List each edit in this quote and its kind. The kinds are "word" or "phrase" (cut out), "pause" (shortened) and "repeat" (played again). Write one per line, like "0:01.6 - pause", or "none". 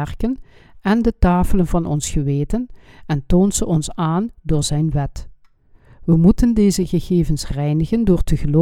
none